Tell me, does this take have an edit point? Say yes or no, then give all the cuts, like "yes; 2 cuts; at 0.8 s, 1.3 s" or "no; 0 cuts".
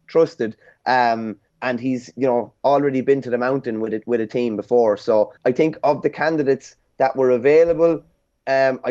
yes; 2 cuts; at 1.5 s, 5.4 s